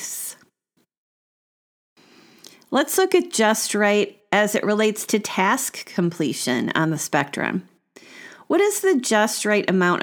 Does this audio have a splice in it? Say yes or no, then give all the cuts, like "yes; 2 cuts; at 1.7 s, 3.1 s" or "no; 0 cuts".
no; 0 cuts